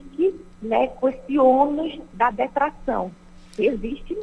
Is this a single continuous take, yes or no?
yes